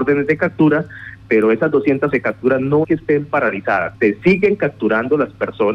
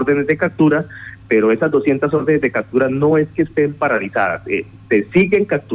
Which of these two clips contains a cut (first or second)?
first